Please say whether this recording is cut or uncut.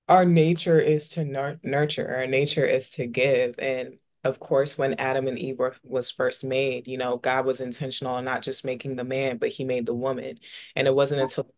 uncut